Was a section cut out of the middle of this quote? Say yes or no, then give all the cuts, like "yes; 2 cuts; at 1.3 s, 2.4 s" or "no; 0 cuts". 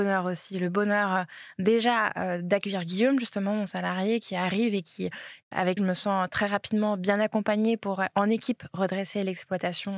yes; 1 cut; at 5.8 s